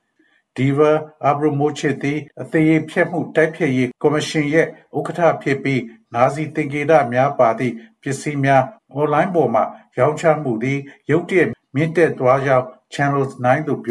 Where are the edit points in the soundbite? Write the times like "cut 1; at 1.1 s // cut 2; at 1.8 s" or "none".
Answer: cut 1; at 2.3 s // cut 2; at 3.9 s // cut 3; at 8.8 s